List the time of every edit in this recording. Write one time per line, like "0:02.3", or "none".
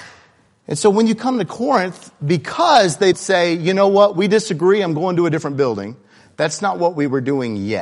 0:03.1